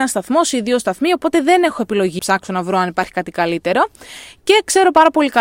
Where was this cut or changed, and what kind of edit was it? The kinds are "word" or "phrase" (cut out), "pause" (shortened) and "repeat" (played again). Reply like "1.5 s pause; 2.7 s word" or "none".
2.2 s word